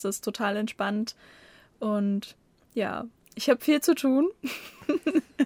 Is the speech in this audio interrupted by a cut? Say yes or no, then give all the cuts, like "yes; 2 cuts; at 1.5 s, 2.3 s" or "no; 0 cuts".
no; 0 cuts